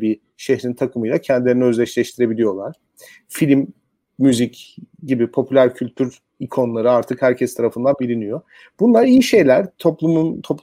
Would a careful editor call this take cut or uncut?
uncut